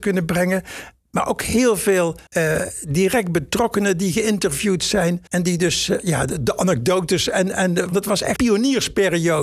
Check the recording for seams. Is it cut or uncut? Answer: cut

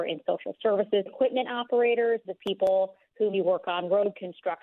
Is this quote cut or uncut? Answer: cut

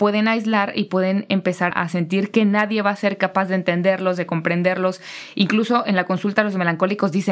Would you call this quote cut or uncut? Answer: cut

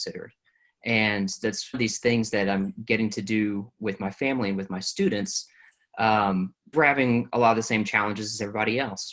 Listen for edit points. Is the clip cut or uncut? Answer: cut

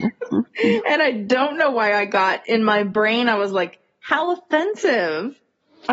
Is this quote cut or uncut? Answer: uncut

